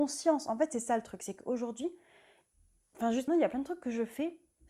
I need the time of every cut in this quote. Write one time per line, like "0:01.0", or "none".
0:03.3